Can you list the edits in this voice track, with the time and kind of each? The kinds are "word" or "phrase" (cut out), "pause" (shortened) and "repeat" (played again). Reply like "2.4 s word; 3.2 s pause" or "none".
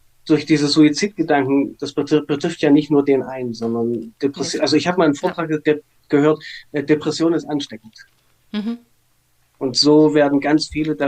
none